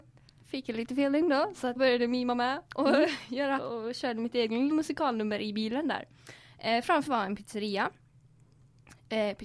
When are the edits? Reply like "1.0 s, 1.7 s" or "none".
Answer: 1.8 s, 3.6 s, 4.7 s, 7.1 s